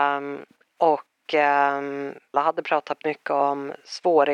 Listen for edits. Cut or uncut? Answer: cut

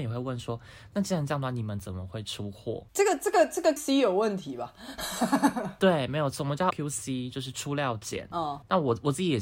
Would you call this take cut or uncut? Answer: cut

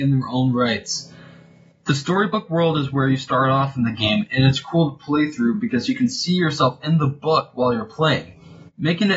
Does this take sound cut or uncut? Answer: uncut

